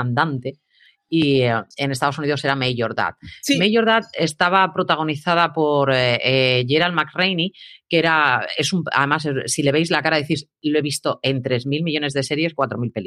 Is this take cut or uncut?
cut